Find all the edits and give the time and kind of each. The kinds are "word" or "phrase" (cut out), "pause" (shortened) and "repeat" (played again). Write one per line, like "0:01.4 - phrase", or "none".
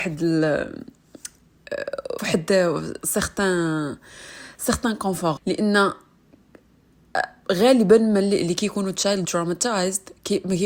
0:02.2 - word
0:03.0 - word
0:05.4 - word
0:09.2 - word